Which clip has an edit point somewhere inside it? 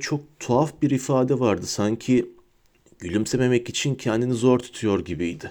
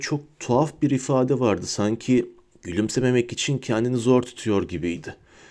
second; 1 cut; at 2.5 s

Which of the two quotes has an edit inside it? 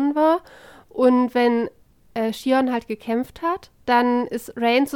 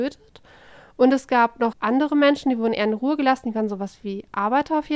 second; 1 cut; at 1.7 s

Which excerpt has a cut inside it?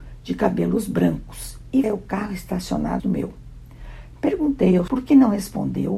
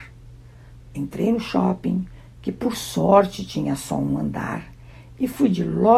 first; 3 cuts; at 1.8 s, 3.0 s, 4.9 s

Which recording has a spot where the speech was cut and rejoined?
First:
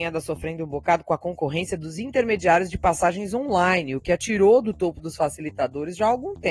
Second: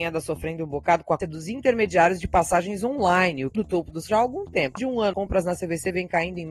second; 5 cuts; at 1.2 s, 3.5 s, 4.1 s, 4.8 s, 5.1 s

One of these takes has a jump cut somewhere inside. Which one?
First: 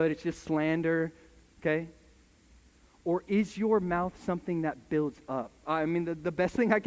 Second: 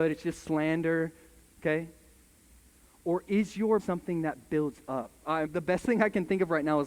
second; 2 cuts; at 3.8 s, 5.4 s

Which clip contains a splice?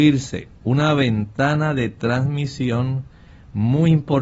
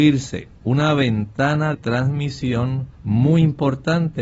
second; 2 cuts; at 1.7 s, 2.9 s

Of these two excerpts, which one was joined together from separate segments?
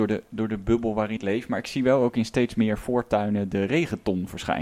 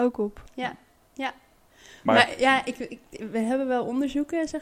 first; 1 cut; at 1.2 s

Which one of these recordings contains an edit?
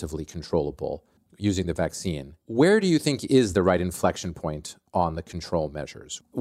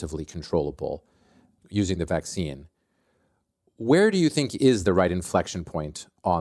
first; 2 cuts; at 1.2 s, 2.4 s

